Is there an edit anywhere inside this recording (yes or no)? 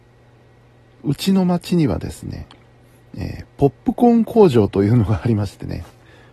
no